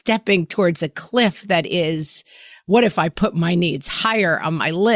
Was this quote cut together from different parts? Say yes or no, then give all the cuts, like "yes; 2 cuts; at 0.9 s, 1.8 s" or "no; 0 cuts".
no; 0 cuts